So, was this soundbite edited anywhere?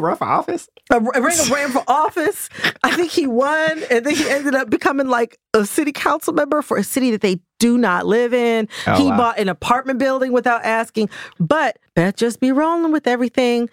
no; 0 cuts

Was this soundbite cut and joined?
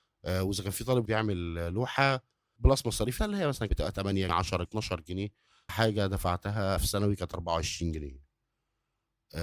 yes; 8 cuts; at 1.1 s, 2.6 s, 3.2 s, 3.7 s, 4.3 s, 4.7 s, 5.7 s, 6.8 s

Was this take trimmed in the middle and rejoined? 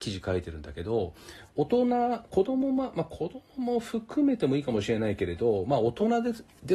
no; 0 cuts

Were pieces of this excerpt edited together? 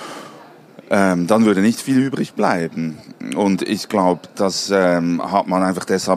no; 0 cuts

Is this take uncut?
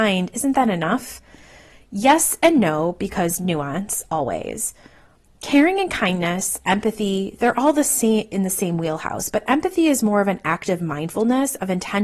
yes; 0 cuts

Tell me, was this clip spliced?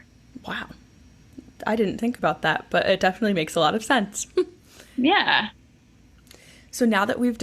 no; 0 cuts

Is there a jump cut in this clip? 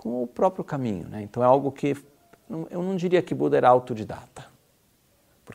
no; 0 cuts

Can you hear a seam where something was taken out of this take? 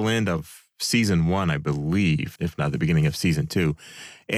yes; 1 cut; at 2.4 s

